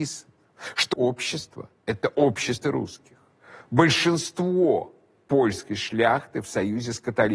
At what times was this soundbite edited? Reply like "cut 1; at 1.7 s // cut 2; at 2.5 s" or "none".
cut 1; at 0.9 s // cut 2; at 2.6 s